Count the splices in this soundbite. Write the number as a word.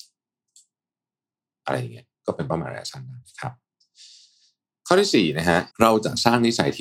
three